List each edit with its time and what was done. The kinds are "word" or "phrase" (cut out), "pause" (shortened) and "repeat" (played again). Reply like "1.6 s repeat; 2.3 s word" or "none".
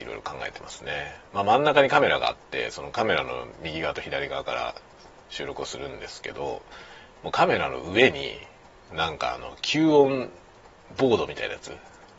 none